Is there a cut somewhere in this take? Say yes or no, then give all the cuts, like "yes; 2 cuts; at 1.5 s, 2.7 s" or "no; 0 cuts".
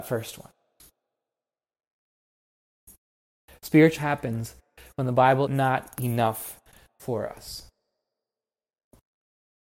yes; 2 cuts; at 4.0 s, 5.5 s